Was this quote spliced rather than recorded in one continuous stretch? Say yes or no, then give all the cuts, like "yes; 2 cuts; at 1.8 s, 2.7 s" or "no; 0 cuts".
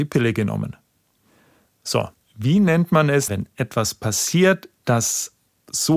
yes; 2 cuts; at 2.1 s, 3.3 s